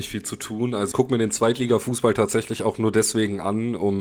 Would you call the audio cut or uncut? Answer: cut